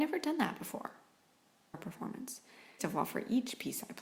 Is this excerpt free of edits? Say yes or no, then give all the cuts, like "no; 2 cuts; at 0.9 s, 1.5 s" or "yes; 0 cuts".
no; 2 cuts; at 1.7 s, 2.8 s